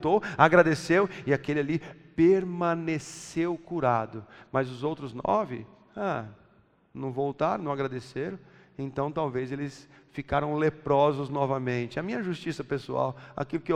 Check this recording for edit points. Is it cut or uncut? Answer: uncut